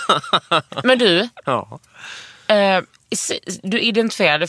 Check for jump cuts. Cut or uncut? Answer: uncut